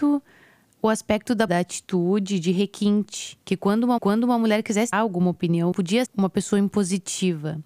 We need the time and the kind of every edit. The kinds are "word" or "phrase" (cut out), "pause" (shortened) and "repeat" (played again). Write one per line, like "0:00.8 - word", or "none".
0:01.5 - word
0:03.4 - pause
0:04.0 - repeat
0:04.9 - word
0:05.7 - word
0:06.1 - word